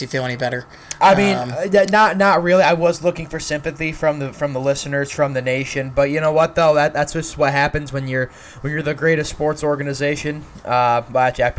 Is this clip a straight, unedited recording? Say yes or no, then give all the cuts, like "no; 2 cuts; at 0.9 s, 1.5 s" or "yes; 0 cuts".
yes; 0 cuts